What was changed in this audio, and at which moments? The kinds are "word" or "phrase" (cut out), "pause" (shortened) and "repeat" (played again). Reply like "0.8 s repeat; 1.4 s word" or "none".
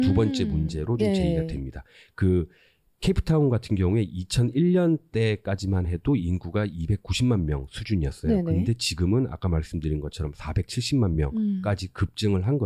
none